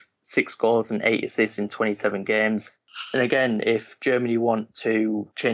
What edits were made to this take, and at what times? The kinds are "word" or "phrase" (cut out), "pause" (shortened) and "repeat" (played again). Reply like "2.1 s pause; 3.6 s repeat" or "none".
none